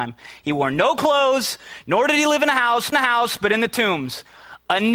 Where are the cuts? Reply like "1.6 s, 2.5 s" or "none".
2.9 s